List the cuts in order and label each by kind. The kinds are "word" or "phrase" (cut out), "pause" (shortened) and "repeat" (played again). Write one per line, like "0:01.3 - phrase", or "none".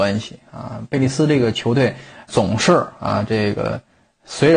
0:02.3 - word

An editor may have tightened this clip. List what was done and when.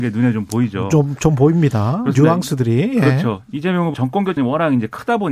0:03.9 - word
0:04.4 - word

